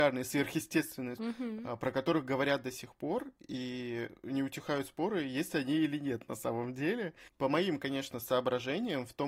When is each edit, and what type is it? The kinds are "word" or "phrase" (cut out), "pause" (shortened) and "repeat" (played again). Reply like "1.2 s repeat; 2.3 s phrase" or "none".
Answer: 1.2 s word